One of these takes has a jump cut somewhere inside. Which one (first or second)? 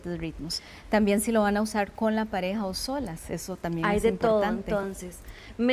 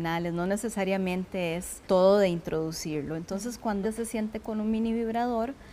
second